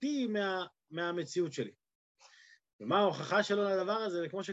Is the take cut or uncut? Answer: uncut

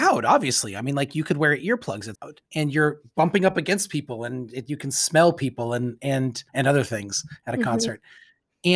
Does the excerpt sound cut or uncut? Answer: cut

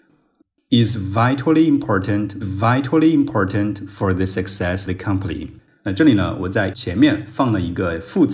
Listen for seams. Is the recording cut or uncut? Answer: cut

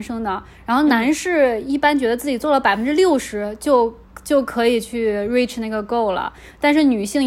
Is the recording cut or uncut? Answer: uncut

